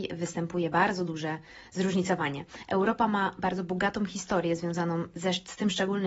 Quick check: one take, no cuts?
yes; 0 cuts

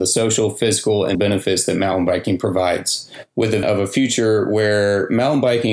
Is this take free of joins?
no; 2 cuts; at 1.1 s, 3.6 s

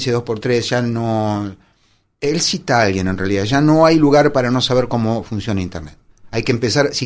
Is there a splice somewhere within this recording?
no; 0 cuts

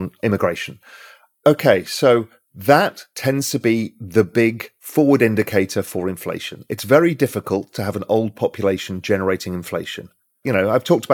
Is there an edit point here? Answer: no; 0 cuts

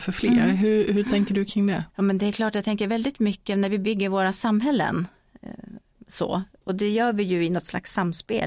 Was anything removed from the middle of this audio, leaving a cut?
yes; 1 cut; at 1.9 s

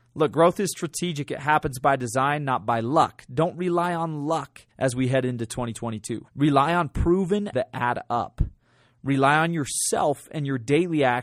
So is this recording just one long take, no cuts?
no; 3 cuts; at 4.7 s, 6.3 s, 7.5 s

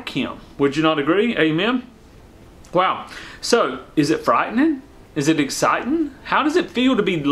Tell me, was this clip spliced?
no; 0 cuts

